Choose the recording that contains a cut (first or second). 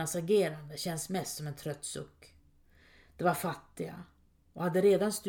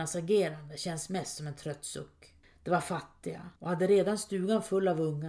second